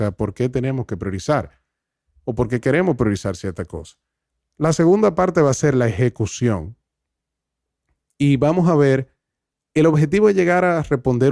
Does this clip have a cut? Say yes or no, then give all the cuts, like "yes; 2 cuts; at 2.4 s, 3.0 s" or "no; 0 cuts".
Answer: no; 0 cuts